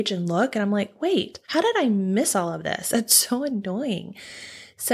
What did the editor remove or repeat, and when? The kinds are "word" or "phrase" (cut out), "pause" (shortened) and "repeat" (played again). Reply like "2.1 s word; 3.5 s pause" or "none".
1.4 s pause

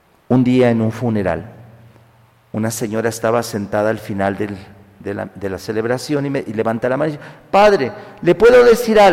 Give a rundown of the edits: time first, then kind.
none

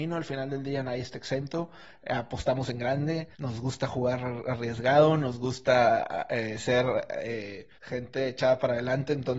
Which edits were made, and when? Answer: 3.3 s pause; 7.7 s pause

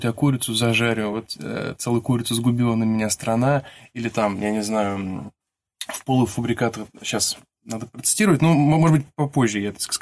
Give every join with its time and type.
none

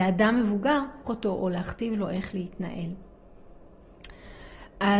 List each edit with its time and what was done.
1.1 s word

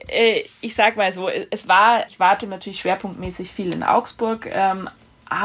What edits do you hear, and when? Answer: 2.1 s word; 2.4 s word

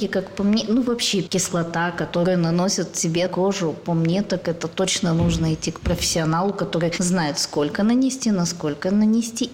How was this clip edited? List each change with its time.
3.3 s word

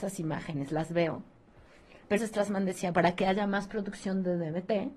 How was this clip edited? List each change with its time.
2.2 s word; 2.9 s word

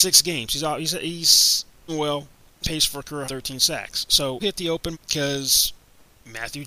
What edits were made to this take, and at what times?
1.9 s word; 2.6 s word; 3.3 s word; 4.4 s word; 4.9 s word

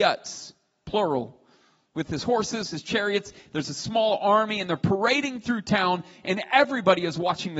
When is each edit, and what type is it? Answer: none

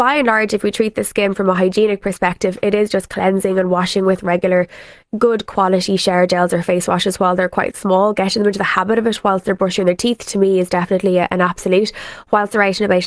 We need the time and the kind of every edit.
none

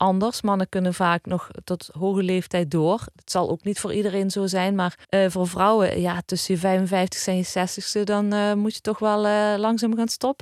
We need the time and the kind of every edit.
5.0 s pause

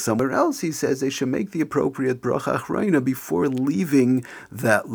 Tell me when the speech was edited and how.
none

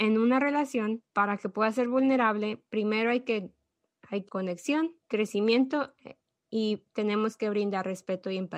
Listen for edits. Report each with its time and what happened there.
1.1 s pause; 4.3 s word; 5.0 s pause

